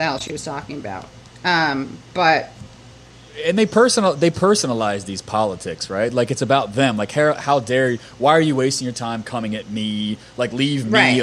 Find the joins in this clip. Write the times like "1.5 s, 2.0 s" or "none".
none

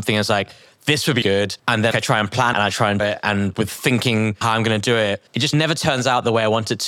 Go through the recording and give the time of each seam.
1.2 s, 1.6 s, 1.9 s, 2.5 s, 3.0 s, 4.4 s, 5.3 s

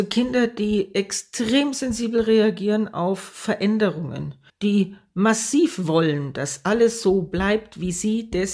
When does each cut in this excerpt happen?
4.5 s

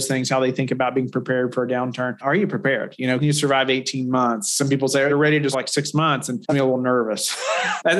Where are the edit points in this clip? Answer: 3.2 s, 5.1 s, 5.5 s, 6.5 s

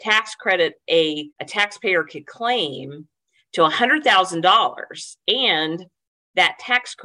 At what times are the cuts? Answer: 1.3 s

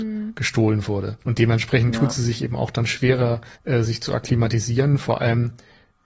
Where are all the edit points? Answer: 1.2 s, 3.5 s

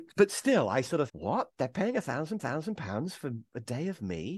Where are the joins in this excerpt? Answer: 1.1 s, 2.4 s, 3.5 s

